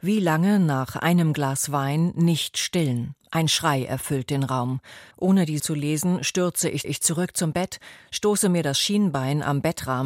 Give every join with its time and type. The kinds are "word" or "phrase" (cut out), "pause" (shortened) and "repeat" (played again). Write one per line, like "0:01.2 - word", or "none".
0:03.2 - pause
0:05.1 - pause
0:05.6 - word
0:06.8 - repeat

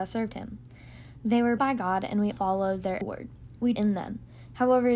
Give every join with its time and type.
0:01.6 - word
0:02.3 - word
0:03.0 - word
0:03.8 - word

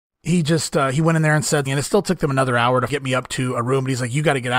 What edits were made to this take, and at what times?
0:01.7 - word
0:02.9 - word

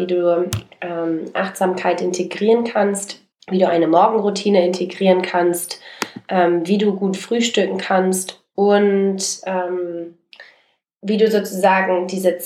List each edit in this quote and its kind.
0:03.3 - pause

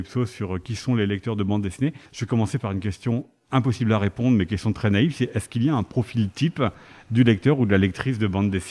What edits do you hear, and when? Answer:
0:02.1 - pause

